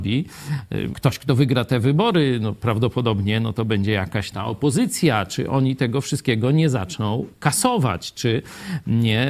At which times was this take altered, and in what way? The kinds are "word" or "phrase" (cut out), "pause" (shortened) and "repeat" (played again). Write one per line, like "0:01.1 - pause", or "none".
0:00.9 - word
0:04.3 - word